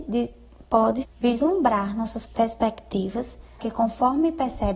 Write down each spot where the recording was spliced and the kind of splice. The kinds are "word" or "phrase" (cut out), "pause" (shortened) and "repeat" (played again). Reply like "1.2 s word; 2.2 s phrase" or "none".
1.0 s word; 2.3 s word; 3.6 s word